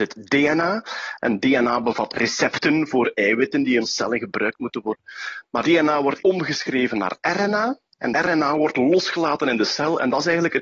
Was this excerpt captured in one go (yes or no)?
no